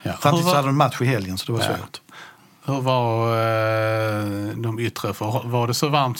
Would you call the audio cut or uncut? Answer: uncut